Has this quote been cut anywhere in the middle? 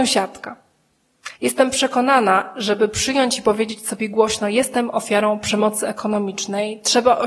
yes; 1 cut; at 1.4 s

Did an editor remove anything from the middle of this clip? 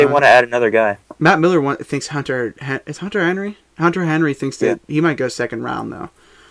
no; 0 cuts

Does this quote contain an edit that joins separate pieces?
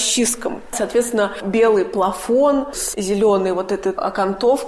no; 0 cuts

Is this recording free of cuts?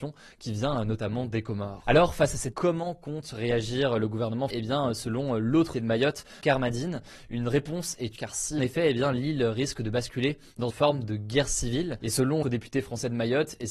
no; 8 cuts; at 2.5 s, 4.5 s, 5.7 s, 6.4 s, 8.2 s, 8.6 s, 10.7 s, 12.4 s

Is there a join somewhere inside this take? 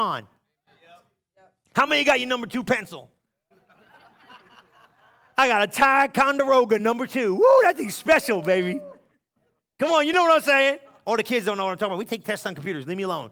no; 0 cuts

